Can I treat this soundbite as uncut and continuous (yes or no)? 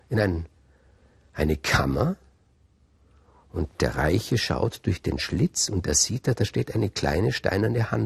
yes